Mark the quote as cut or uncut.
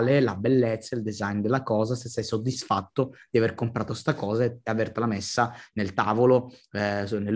uncut